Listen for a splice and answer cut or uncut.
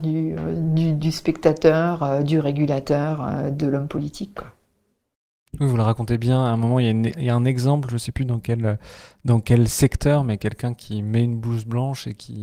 uncut